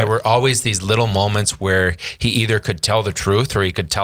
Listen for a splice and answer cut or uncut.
uncut